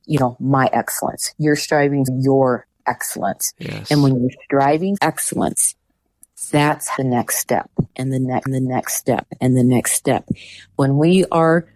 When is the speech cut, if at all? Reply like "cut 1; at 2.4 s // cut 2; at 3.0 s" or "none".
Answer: cut 1; at 2.1 s // cut 2; at 5.0 s // cut 3; at 7.0 s // cut 4; at 8.5 s

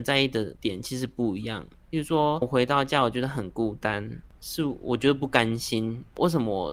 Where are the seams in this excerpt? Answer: cut 1; at 2.4 s

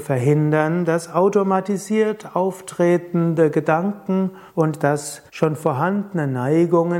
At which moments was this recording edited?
cut 1; at 4.5 s // cut 2; at 5.3 s

